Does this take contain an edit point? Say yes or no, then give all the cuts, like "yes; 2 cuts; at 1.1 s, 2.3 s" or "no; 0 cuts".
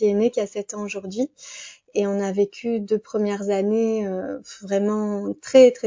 no; 0 cuts